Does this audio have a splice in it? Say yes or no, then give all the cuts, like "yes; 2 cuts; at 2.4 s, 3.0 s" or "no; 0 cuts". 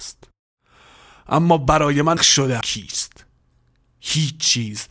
yes; 2 cuts; at 2.2 s, 2.6 s